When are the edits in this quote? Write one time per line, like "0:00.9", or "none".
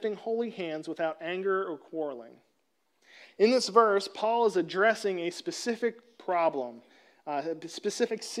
none